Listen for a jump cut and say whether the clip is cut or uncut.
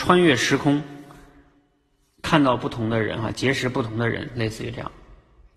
uncut